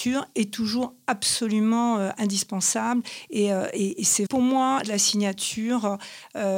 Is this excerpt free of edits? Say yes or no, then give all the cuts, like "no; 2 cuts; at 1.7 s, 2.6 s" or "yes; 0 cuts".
no; 2 cuts; at 4.3 s, 4.8 s